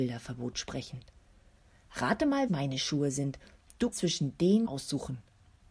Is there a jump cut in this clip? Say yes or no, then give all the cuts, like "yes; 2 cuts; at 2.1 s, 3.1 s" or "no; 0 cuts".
yes; 3 cuts; at 2.5 s, 3.9 s, 4.6 s